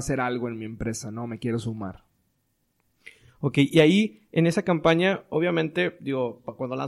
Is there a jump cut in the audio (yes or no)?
no